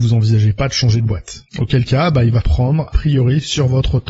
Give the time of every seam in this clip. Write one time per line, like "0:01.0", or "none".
0:01.5
0:02.4
0:02.9